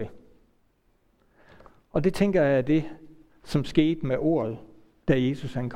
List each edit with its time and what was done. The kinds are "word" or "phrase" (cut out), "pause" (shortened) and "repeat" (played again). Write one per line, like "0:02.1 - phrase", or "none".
none